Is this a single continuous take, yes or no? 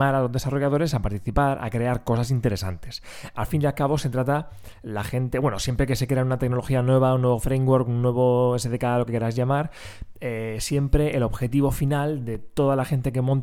yes